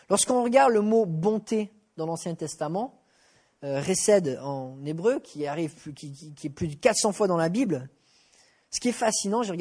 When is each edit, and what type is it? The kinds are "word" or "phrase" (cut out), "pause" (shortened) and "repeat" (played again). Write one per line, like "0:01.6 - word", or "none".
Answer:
none